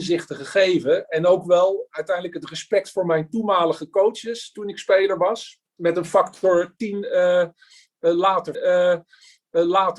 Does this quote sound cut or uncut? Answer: cut